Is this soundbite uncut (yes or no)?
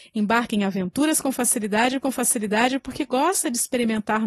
no